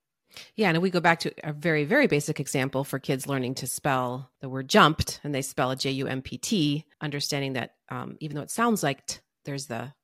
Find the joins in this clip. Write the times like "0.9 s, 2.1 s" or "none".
4.4 s, 6.9 s